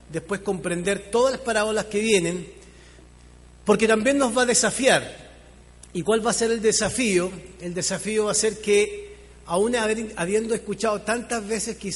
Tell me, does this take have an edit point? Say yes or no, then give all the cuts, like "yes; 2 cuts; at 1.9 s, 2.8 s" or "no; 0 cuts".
no; 0 cuts